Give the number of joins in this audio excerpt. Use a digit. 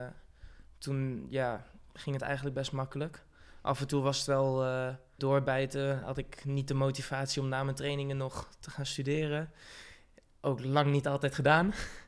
1